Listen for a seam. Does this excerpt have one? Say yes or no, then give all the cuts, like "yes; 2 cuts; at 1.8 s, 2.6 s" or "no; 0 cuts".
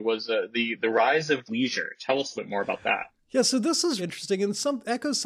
yes; 3 cuts; at 1.5 s, 2.4 s, 4.0 s